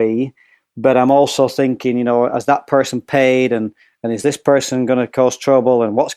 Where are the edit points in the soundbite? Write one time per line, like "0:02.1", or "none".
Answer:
none